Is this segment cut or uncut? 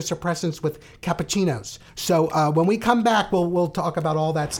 cut